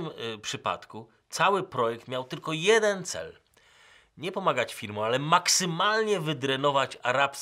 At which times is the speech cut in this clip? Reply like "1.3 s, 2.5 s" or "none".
none